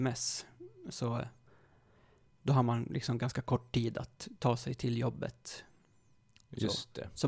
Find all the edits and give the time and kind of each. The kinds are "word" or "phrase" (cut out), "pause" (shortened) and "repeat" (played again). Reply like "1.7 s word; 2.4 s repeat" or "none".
none